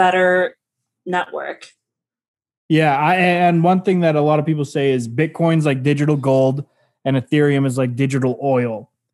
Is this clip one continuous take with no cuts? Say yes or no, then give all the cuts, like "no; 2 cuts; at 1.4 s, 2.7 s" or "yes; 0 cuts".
yes; 0 cuts